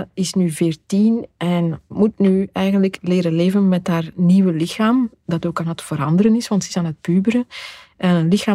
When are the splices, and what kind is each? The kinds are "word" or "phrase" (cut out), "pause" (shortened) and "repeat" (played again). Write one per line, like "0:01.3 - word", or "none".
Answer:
0:01.9 - word